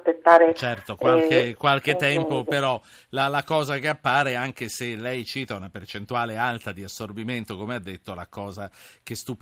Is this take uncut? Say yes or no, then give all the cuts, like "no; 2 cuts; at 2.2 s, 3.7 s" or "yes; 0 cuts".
yes; 0 cuts